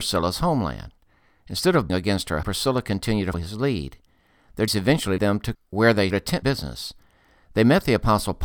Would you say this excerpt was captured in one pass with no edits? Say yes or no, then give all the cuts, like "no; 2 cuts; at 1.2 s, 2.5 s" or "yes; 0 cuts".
no; 8 cuts; at 1.9 s, 2.4 s, 3.3 s, 4.7 s, 5.2 s, 5.5 s, 6.1 s, 6.4 s